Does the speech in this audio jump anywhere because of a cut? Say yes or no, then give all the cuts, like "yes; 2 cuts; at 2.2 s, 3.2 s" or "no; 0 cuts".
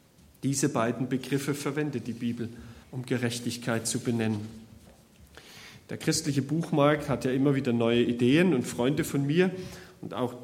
yes; 1 cut; at 2.8 s